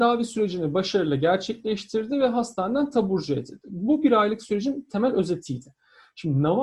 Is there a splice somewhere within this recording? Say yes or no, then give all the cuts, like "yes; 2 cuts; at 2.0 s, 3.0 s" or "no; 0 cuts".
no; 0 cuts